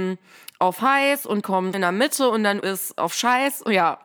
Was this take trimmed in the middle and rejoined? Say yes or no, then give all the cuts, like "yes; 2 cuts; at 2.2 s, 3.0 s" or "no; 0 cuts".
yes; 3 cuts; at 1.4 s, 1.7 s, 2.6 s